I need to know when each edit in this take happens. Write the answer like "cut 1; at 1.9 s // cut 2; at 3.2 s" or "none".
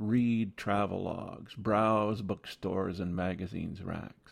none

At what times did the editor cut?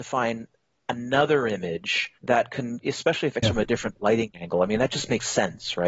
cut 1; at 2.2 s // cut 2; at 2.8 s // cut 3; at 3.4 s

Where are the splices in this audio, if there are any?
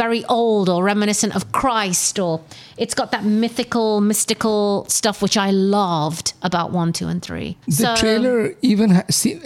cut 1; at 7.6 s

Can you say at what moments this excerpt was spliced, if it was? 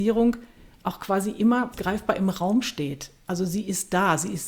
cut 1; at 1.7 s

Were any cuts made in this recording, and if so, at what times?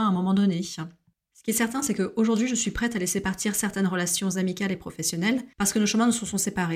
cut 1; at 5.5 s

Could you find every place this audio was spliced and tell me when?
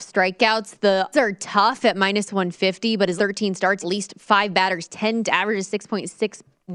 cut 1; at 1.1 s // cut 2; at 3.2 s // cut 3; at 3.8 s // cut 4; at 5.3 s

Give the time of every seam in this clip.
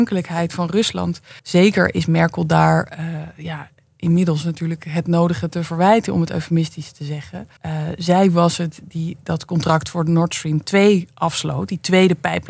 cut 1; at 1.4 s // cut 2; at 7.6 s

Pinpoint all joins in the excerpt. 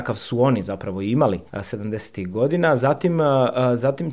cut 1; at 1.5 s

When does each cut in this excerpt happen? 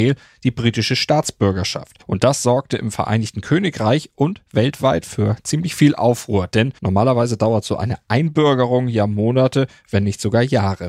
cut 1; at 2.0 s // cut 2; at 6.8 s

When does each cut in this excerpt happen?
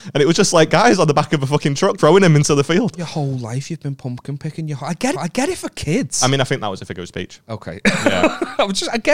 cut 1; at 2.0 s // cut 2; at 5.1 s

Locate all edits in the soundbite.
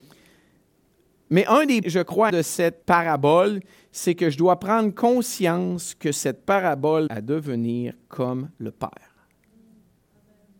cut 1; at 1.8 s // cut 2; at 2.3 s // cut 3; at 2.8 s // cut 4; at 7.1 s

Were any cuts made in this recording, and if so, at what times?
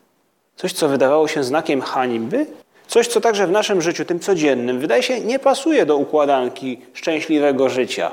cut 1; at 2.6 s

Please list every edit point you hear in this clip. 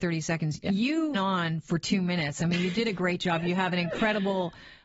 cut 1; at 1.1 s

